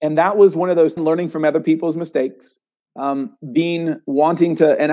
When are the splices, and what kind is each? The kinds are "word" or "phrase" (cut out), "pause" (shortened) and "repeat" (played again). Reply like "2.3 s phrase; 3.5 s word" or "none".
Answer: 1.0 s phrase